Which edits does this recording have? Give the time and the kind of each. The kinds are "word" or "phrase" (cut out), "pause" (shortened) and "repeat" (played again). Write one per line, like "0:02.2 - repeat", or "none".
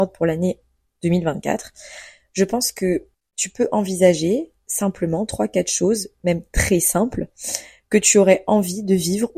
none